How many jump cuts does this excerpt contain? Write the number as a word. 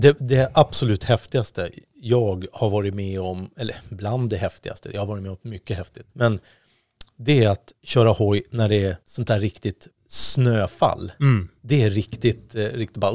four